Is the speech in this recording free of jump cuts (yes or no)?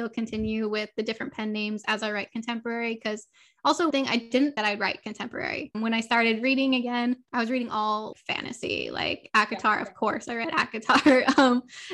no